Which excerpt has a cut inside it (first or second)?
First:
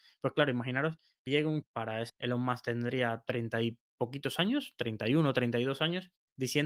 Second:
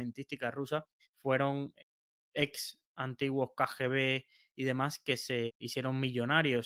first